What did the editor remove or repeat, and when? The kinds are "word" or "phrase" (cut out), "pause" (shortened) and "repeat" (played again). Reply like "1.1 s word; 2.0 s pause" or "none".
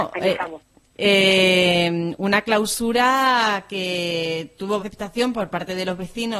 4.8 s word